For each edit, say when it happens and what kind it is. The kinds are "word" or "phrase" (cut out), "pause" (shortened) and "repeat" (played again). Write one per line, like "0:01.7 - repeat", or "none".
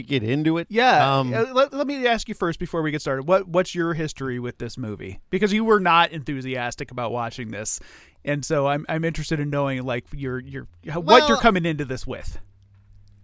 none